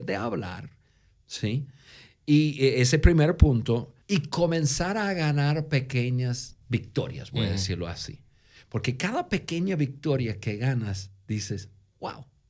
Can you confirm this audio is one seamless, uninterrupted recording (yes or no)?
no